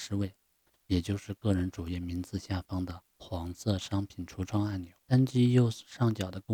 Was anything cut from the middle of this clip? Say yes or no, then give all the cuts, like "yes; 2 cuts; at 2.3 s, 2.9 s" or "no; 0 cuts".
yes; 2 cuts; at 3.1 s, 5.0 s